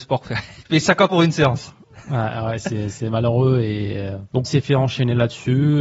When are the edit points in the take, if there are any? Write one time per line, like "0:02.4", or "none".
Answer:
0:01.1
0:04.4